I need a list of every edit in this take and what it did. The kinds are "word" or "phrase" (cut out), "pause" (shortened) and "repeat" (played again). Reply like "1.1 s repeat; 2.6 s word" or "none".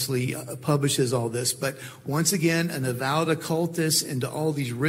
none